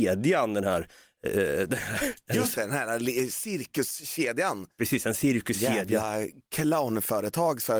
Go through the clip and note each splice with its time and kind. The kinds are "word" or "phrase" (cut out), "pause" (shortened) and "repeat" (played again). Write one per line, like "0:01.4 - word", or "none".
none